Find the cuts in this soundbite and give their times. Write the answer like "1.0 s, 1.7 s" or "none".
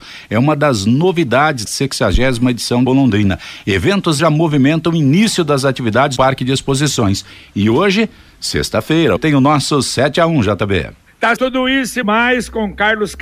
1.6 s, 2.9 s, 4.2 s, 6.2 s, 9.2 s, 11.4 s, 12.0 s